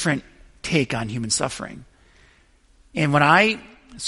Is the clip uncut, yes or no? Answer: yes